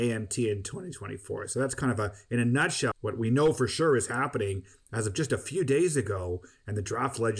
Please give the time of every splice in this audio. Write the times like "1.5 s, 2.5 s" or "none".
2.9 s

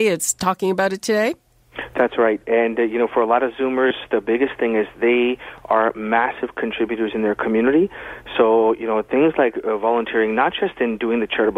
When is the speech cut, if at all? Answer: none

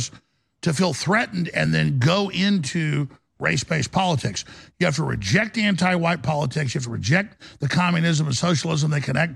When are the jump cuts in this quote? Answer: none

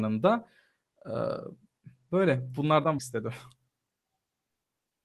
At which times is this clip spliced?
3.0 s

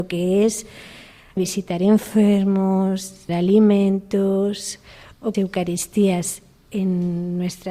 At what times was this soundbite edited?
1.4 s, 3.3 s, 5.3 s

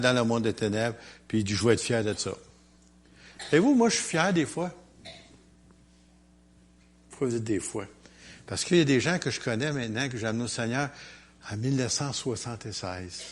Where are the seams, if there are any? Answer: none

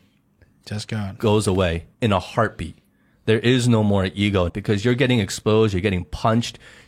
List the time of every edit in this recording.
1.9 s, 4.5 s

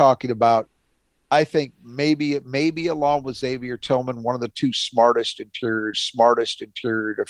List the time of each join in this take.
5.9 s

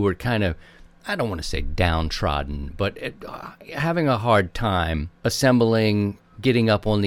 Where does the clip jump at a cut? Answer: 5.2 s

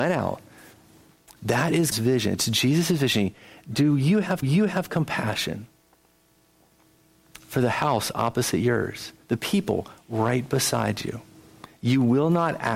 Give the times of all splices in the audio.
1.9 s, 4.4 s, 9.2 s

